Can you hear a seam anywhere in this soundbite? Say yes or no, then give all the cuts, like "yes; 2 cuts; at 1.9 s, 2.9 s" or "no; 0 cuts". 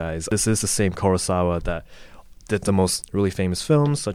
no; 0 cuts